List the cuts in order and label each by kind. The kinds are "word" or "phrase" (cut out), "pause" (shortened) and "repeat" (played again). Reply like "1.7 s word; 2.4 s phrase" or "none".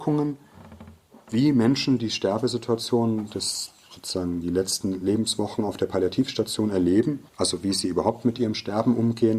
7.3 s pause

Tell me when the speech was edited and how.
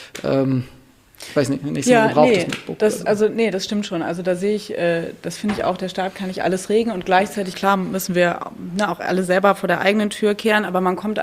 7.5 s word

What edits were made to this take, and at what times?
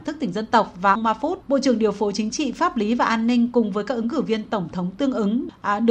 0.9 s word; 1.4 s pause

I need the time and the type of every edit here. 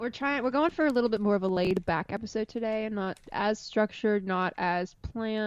3.3 s pause

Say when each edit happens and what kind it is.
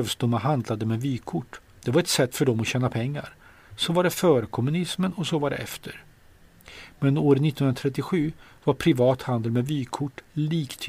none

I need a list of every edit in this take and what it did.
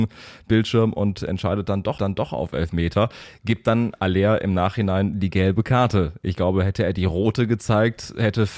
2.0 s repeat

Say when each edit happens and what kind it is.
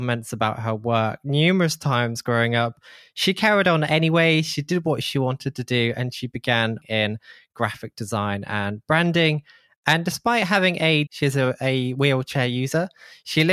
6.8 s word; 11.1 s word

